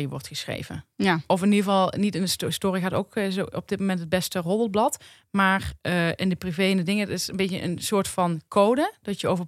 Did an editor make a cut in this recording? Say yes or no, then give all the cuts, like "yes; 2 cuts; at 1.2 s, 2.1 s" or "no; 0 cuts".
no; 0 cuts